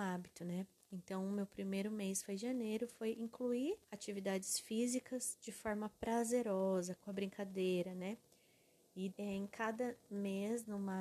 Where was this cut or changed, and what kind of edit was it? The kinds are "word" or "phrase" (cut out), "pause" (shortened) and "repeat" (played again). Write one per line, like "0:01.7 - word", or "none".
0:03.8 - pause
0:07.0 - phrase
0:09.1 - word